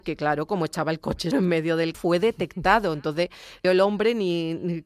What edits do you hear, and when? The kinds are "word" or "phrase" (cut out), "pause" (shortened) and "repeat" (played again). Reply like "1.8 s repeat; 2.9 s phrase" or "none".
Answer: 1.3 s word; 1.9 s word; 3.6 s word